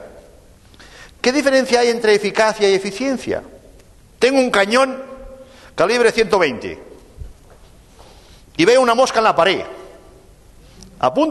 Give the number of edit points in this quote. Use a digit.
0